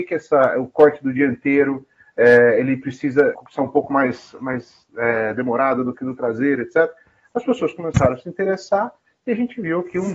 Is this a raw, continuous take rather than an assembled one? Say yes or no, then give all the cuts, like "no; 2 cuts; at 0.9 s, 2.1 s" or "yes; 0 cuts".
no; 1 cut; at 3.3 s